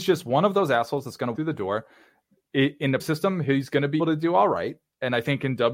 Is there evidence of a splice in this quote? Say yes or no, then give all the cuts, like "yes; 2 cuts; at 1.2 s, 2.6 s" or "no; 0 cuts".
yes; 3 cuts; at 1.3 s, 3.0 s, 4.0 s